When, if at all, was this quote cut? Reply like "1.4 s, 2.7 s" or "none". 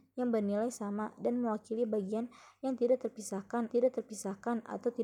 3.7 s